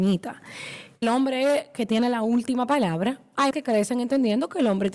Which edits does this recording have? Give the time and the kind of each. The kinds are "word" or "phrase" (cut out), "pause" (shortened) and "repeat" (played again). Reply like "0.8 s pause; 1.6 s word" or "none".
1.0 s word; 3.5 s word